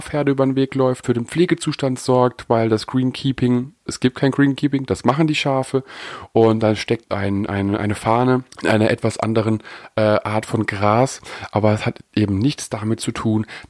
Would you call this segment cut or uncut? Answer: cut